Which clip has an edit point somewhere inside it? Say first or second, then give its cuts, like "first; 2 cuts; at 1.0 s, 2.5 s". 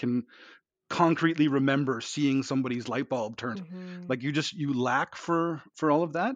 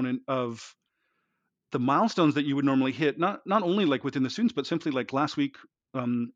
first; 1 cut; at 3.6 s